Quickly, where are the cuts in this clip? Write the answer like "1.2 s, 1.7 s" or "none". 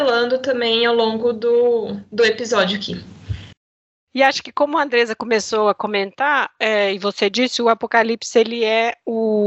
none